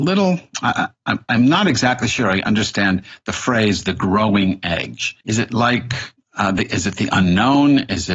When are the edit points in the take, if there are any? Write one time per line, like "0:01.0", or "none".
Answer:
0:05.2
0:06.2